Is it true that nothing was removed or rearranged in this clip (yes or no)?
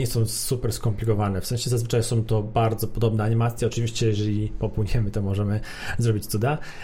yes